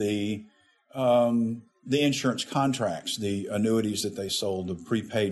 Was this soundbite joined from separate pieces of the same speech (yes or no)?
no